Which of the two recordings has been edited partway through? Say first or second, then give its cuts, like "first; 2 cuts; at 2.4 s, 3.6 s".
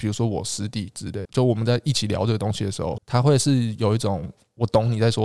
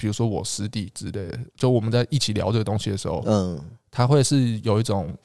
first; 2 cuts; at 1.2 s, 3.0 s